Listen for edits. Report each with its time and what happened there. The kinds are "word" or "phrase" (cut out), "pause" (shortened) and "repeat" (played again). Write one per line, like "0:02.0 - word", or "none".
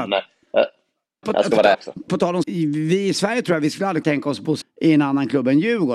0:01.2 - word
0:01.7 - word
0:02.1 - word
0:02.4 - word
0:04.0 - word
0:04.6 - word